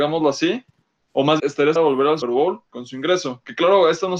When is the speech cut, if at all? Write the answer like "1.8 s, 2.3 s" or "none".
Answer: 1.4 s, 1.8 s, 2.2 s, 2.7 s